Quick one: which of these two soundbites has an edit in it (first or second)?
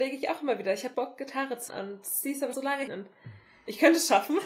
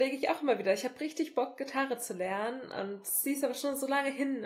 first